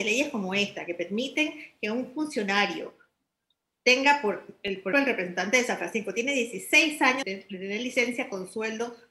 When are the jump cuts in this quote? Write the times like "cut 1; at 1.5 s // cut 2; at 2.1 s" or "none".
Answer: cut 1; at 4.9 s // cut 2; at 7.2 s